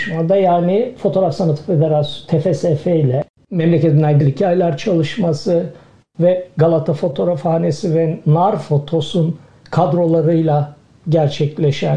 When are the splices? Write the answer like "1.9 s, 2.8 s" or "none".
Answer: 4.2 s, 6.0 s